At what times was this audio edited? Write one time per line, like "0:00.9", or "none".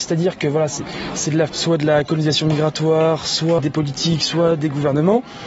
0:01.5
0:03.6

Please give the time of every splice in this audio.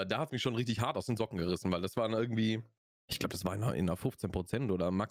0:02.8

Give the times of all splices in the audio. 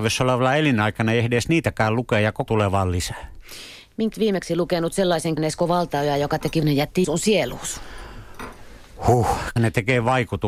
0:02.5
0:04.1
0:05.4
0:06.6
0:07.0
0:09.6

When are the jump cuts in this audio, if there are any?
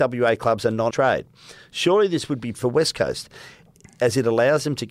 0:00.9
0:02.5

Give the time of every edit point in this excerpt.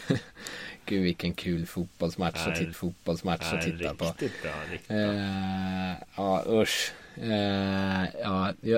0:02.7

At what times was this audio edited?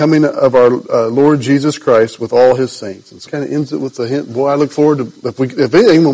0:03.3

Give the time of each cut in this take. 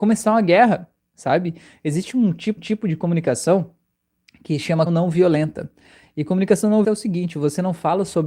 0:02.6
0:04.9
0:06.8

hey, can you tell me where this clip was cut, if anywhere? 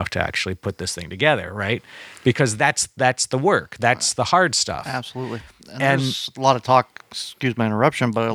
none

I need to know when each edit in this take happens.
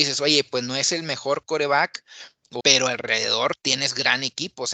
0:02.6

